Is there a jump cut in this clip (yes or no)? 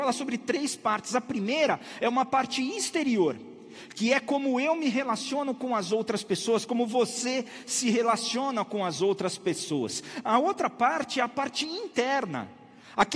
no